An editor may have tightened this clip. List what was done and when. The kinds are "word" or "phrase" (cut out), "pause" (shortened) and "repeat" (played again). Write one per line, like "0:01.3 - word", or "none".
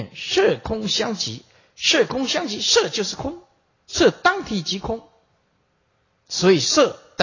none